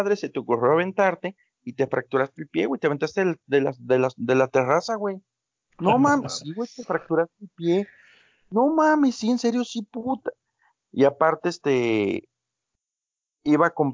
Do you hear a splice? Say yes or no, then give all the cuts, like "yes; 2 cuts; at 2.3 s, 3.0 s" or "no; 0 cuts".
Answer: no; 0 cuts